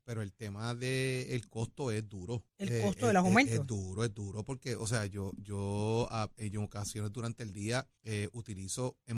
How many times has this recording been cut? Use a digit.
2